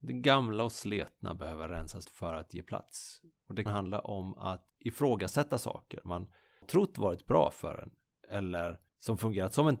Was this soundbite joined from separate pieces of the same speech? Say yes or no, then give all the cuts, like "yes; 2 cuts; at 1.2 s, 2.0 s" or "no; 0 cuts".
yes; 5 cuts; at 2.0 s, 3.7 s, 4.7 s, 6.6 s, 8.9 s